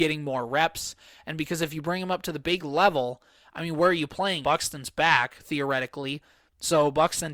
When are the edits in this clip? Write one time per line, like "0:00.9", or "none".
0:02.6
0:04.4